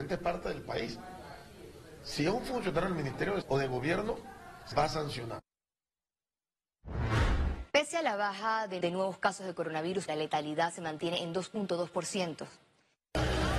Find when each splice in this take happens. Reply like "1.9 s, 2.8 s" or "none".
3.4 s, 4.7 s, 7.7 s, 8.8 s, 10.1 s